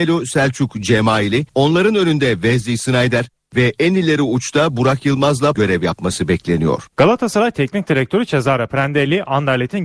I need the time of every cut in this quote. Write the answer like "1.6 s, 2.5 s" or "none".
1.5 s, 5.5 s, 6.9 s